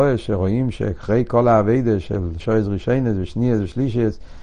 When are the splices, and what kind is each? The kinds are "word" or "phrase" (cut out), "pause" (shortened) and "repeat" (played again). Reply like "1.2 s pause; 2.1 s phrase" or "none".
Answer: 2.4 s word